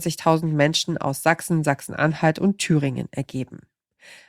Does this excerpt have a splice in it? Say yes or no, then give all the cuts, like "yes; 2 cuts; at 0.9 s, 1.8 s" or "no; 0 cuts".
no; 0 cuts